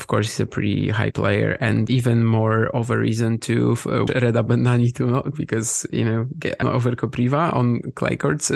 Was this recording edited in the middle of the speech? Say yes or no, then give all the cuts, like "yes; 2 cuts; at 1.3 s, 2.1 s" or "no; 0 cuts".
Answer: yes; 5 cuts; at 1.1 s, 1.9 s, 4.1 s, 5.3 s, 6.6 s